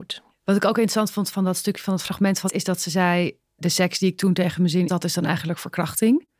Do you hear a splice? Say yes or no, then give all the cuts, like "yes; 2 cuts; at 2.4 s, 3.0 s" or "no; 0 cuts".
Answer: yes; 4 cuts; at 1.3 s, 2.5 s, 3.5 s, 4.9 s